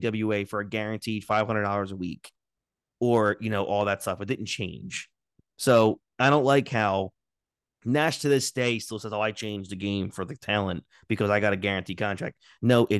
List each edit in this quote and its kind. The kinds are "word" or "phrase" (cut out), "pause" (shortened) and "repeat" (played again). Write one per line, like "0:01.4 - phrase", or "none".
none